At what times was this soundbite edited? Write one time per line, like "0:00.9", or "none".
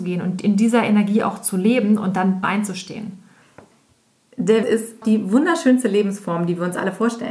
0:02.4
0:04.6
0:05.0